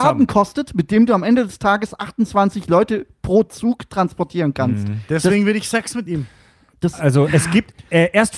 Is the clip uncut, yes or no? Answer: yes